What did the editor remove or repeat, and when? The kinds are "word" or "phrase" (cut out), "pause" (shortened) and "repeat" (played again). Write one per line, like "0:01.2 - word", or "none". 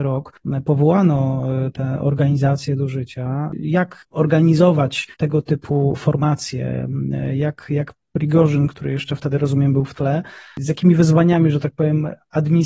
0:05.1 - pause